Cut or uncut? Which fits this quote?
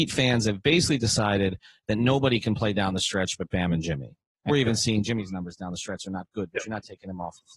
cut